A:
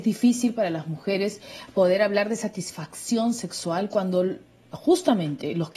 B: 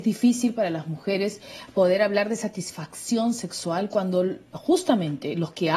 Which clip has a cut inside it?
B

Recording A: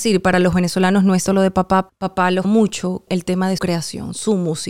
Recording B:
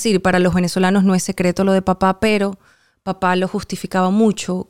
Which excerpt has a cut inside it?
A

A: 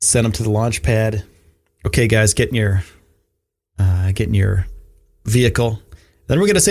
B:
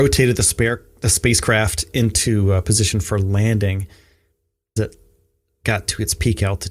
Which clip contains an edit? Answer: B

